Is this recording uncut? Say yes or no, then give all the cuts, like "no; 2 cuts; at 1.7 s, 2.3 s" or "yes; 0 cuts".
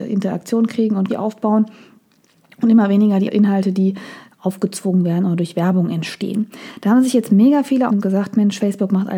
no; 3 cuts; at 1.1 s, 3.3 s, 7.9 s